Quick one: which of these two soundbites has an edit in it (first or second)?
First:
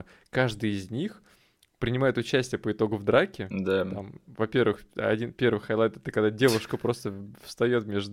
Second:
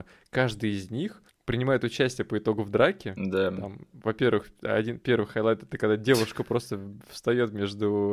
second